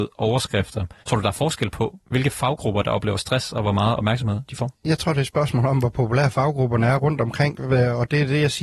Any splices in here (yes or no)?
yes